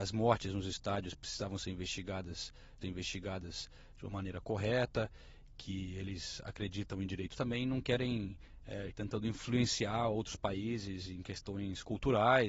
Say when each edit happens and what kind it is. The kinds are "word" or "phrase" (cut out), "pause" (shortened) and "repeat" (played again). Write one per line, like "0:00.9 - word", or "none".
0:02.8 - repeat
0:07.3 - phrase
0:08.9 - word